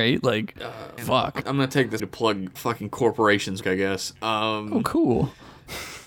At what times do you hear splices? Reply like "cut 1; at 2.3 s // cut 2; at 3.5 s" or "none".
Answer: cut 1; at 1.0 s // cut 2; at 1.4 s // cut 3; at 2.0 s // cut 4; at 2.6 s // cut 5; at 3.6 s